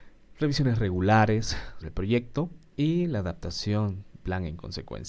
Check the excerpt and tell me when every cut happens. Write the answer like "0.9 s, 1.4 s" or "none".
1.8 s, 4.2 s